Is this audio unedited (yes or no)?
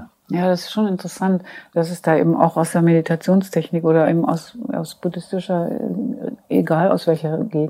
yes